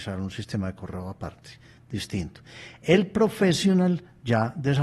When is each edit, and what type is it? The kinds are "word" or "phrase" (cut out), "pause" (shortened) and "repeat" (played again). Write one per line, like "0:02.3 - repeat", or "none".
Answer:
none